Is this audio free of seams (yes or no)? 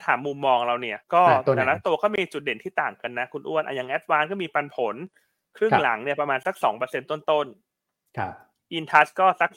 no